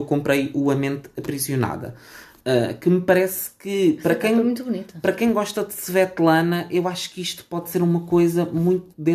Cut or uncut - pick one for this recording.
uncut